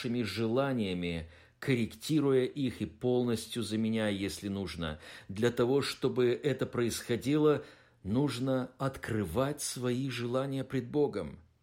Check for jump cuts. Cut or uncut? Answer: uncut